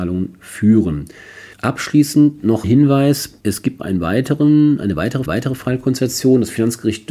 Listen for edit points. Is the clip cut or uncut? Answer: cut